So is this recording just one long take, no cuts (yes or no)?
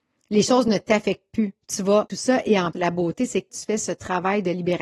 no